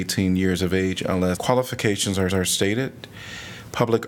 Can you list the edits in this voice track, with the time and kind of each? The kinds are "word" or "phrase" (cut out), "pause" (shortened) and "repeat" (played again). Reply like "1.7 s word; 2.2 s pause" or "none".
1.4 s word; 2.3 s repeat